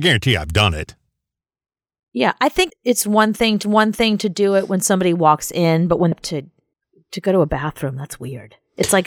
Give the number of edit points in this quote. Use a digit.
5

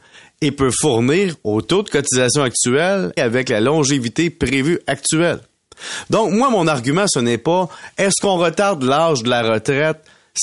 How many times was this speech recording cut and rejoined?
1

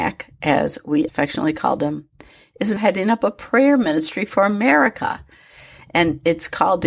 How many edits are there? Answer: 2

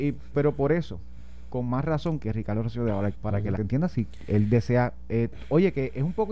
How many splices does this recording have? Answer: 3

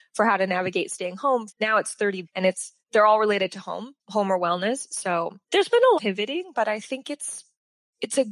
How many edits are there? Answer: 6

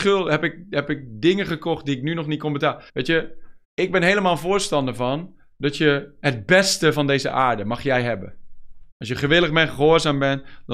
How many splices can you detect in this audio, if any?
3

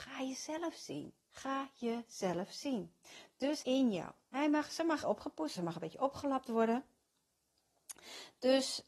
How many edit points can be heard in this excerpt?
4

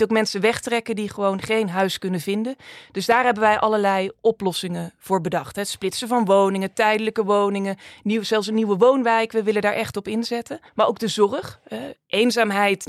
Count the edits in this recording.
1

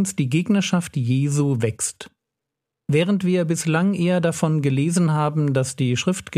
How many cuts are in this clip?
0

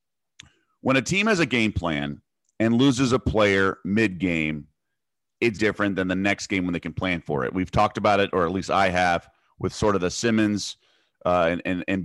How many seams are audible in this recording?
1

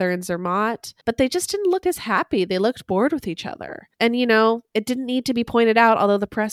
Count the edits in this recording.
3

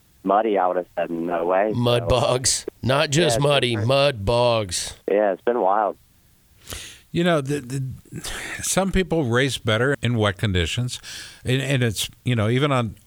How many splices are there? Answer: 2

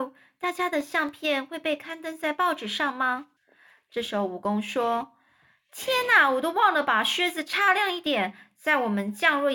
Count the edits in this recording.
1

